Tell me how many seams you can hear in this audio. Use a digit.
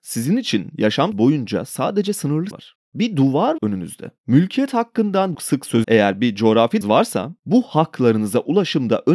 7